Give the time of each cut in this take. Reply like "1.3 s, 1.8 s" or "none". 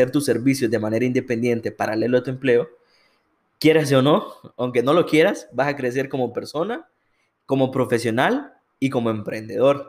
none